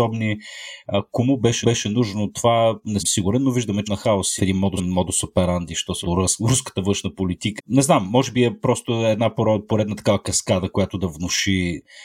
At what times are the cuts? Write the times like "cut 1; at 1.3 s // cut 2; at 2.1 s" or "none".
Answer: cut 1; at 1.6 s // cut 2; at 3.0 s // cut 3; at 3.8 s // cut 4; at 4.4 s // cut 5; at 4.8 s // cut 6; at 6.0 s // cut 7; at 7.6 s